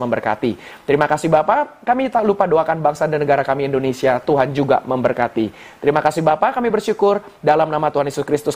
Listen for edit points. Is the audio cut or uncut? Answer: uncut